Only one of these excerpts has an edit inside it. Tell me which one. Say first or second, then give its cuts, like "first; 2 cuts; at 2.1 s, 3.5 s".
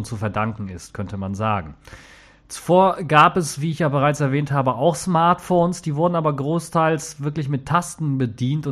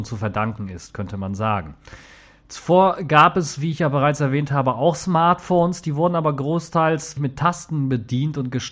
second; 1 cut; at 7.2 s